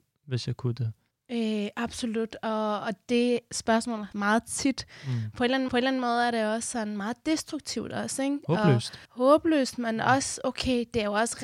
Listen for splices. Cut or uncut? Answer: cut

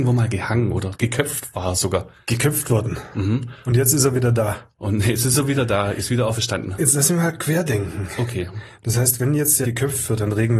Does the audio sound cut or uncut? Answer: cut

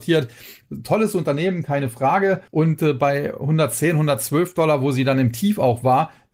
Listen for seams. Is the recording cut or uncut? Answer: cut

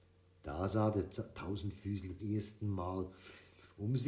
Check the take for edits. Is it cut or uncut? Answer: cut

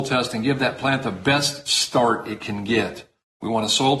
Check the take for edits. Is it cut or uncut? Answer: uncut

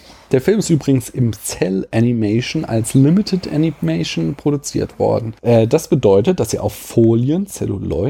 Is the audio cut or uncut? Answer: cut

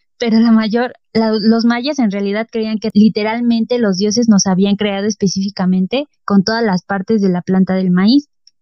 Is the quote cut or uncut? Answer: cut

